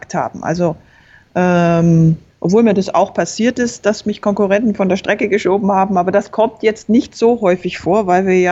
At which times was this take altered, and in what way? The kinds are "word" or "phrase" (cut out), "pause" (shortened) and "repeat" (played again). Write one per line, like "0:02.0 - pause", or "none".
none